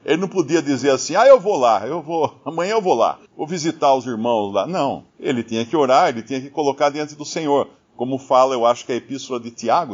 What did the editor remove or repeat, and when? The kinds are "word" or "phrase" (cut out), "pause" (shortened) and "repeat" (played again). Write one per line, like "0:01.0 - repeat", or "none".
0:03.3 - pause
0:05.1 - pause